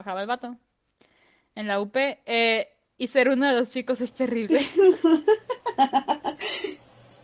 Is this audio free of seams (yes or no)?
yes